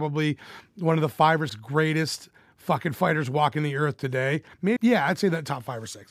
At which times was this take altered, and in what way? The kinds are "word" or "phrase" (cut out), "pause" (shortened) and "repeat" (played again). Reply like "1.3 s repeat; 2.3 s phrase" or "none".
1.5 s word; 4.8 s word